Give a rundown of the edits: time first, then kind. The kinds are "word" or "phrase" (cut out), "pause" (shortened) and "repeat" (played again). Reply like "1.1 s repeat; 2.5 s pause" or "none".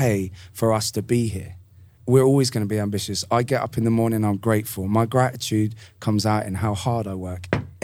2.0 s word